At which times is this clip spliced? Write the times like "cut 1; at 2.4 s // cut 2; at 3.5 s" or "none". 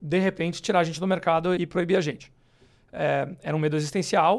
cut 1; at 1.6 s